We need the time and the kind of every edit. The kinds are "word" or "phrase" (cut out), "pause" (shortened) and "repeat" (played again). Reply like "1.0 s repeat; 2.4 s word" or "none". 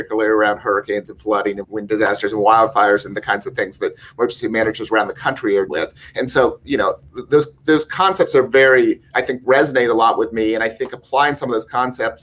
1.6 s word; 5.7 s word